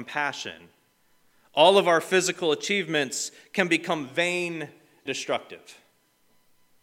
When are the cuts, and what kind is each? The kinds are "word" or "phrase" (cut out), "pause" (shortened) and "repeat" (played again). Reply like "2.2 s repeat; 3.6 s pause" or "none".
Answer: 5.1 s word